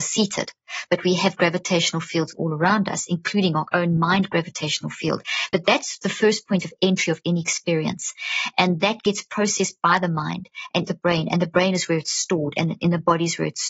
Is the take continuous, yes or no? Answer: no